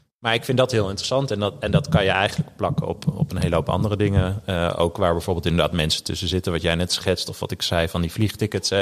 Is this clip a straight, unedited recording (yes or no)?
yes